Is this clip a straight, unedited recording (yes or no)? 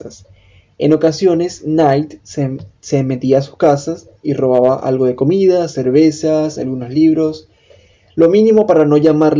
yes